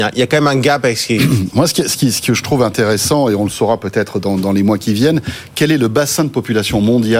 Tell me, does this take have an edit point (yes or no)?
no